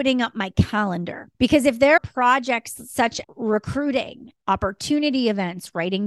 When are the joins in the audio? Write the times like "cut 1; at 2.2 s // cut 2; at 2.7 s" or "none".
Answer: cut 1; at 1.3 s // cut 2; at 2.0 s // cut 3; at 3.2 s